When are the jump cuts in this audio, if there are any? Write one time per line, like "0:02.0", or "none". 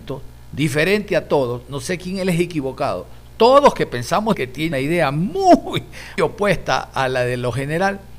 0:04.3
0:04.7
0:06.2